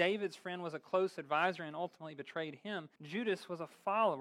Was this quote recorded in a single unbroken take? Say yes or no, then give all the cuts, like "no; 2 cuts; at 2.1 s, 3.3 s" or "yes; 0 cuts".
no; 1 cut; at 3.0 s